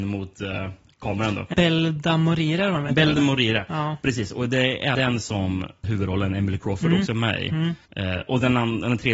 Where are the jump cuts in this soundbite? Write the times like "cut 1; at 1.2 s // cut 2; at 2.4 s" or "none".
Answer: cut 1; at 1.5 s // cut 2; at 4.9 s // cut 3; at 5.8 s // cut 4; at 7.9 s